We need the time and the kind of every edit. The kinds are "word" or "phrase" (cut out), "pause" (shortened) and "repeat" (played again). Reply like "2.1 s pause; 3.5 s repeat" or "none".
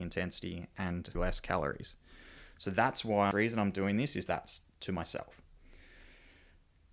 1.1 s word; 3.3 s phrase; 4.3 s phrase